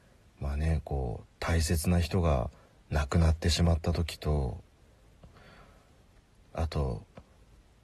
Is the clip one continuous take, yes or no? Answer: yes